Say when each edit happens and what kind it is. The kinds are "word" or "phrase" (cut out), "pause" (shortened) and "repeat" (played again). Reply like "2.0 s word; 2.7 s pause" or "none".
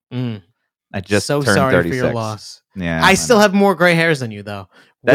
none